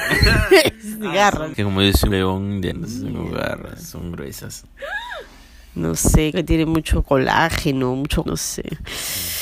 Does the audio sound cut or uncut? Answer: cut